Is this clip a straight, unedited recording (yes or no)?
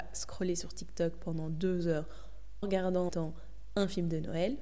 no